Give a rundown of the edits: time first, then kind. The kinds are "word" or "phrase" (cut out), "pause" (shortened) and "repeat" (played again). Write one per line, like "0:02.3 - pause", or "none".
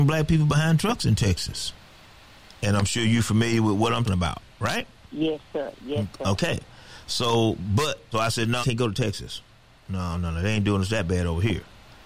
0:04.1 - word
0:08.1 - word
0:08.6 - word

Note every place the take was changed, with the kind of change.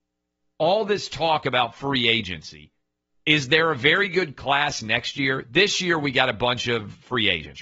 none

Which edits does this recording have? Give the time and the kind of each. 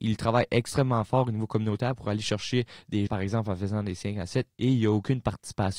0:03.1 - word

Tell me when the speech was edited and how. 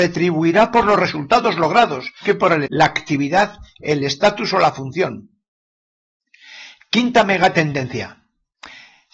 0:02.2 - word
0:02.7 - word

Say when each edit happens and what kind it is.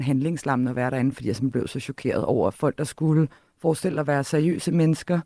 0:03.4 - pause

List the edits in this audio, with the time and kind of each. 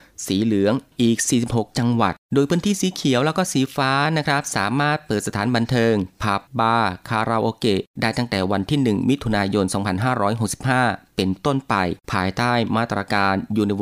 0:02.2 - pause
0:06.5 - pause
0:07.9 - pause
0:12.0 - pause

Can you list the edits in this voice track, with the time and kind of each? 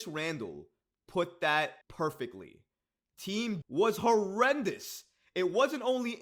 0:01.8 - pause
0:03.6 - word

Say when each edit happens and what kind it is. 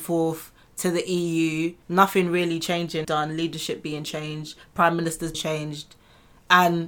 0:01.8 - pause
0:03.0 - phrase
0:05.3 - word

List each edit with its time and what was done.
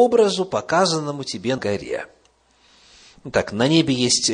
0:01.6 - word

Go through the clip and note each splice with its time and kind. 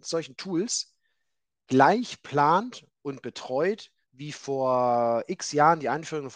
none

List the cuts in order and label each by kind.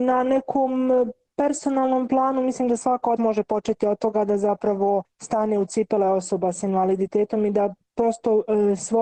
0:03.2 - word

